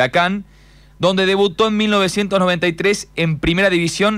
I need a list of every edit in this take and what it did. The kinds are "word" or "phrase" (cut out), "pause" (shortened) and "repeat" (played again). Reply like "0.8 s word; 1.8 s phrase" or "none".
none